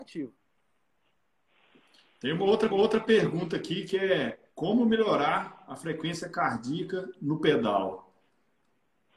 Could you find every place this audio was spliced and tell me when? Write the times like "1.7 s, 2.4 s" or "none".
2.7 s, 4.5 s